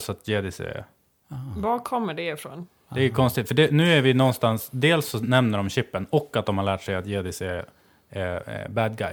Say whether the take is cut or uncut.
uncut